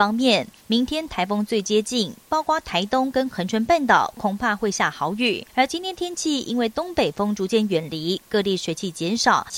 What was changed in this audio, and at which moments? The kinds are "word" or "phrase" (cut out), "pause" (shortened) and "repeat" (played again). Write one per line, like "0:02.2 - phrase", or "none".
0:05.5 - pause

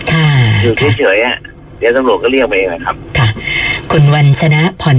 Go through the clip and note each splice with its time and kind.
none

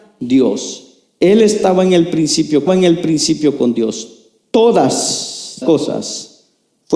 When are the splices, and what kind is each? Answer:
0:02.7 - repeat
0:05.6 - word

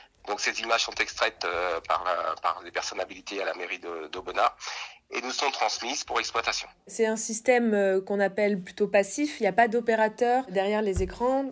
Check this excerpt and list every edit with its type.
0:06.8 - pause

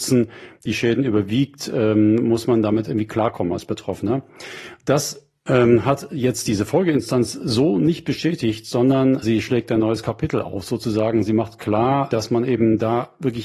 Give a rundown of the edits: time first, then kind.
0:09.2 - word
0:12.1 - word

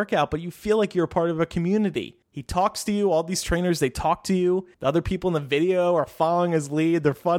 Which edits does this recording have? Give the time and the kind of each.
0:02.2 - pause
0:04.7 - pause

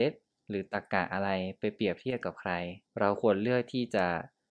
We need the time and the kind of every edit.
0:02.9 - pause

